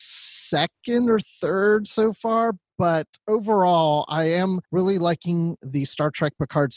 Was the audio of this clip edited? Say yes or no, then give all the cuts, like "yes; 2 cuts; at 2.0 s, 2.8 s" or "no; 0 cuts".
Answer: yes; 1 cut; at 4.6 s